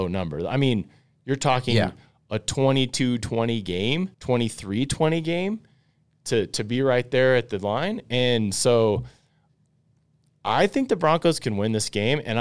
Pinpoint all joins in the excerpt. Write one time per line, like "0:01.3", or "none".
0:04.1